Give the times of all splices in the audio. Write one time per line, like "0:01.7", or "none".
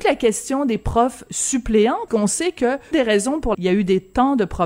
0:02.1
0:02.9
0:03.5